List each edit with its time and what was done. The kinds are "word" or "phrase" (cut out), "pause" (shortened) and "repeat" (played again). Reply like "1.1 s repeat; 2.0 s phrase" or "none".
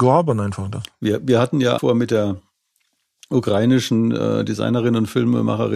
1.8 s phrase